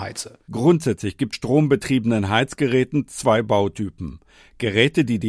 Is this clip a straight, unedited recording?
no; 1 cut; at 1.3 s

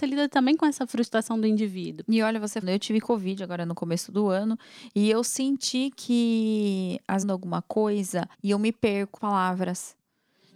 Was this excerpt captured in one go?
no; 4 cuts; at 2.6 s, 7.2 s, 8.3 s, 9.2 s

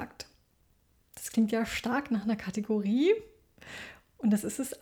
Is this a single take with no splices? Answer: yes; 0 cuts

